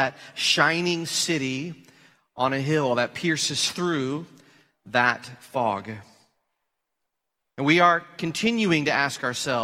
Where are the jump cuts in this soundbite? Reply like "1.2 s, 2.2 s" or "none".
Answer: none